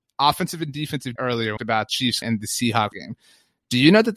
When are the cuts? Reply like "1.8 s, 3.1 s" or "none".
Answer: 1.2 s, 1.6 s, 1.9 s, 2.2 s, 2.9 s